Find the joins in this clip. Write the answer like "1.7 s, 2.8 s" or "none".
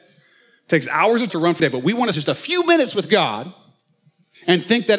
1.3 s, 1.6 s, 2.1 s